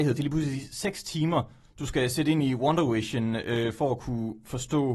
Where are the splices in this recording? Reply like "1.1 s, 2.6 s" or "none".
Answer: none